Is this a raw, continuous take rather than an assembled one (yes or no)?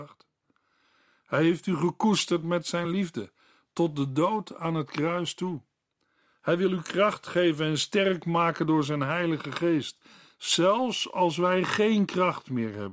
yes